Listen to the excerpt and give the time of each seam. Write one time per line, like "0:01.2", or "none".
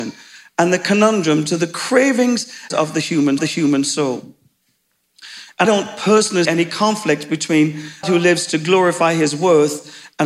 0:02.7
0:03.4
0:05.6
0:06.4
0:08.0